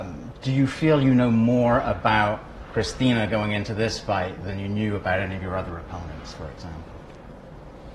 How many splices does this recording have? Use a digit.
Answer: 0